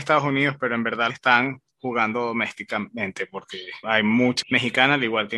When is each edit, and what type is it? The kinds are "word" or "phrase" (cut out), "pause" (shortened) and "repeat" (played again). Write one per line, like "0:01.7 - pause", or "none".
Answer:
0:01.1 - phrase
0:01.7 - pause
0:03.8 - word
0:04.4 - word